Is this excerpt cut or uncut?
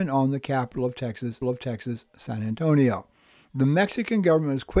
cut